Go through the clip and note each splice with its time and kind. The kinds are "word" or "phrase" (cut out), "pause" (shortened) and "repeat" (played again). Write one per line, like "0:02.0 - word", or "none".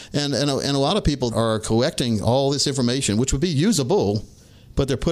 0:01.3 - word